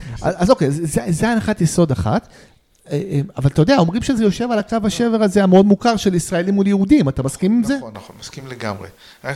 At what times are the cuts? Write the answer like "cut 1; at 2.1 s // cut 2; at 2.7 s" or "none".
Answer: none